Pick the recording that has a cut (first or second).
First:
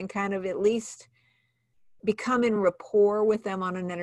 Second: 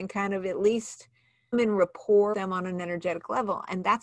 second